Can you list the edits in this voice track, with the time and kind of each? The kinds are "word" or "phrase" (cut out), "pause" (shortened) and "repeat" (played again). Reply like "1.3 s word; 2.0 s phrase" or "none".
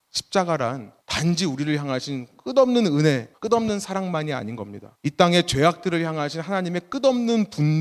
1.0 s pause; 3.4 s pause; 4.9 s pause